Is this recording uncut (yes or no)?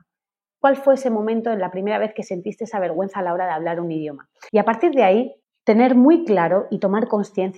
no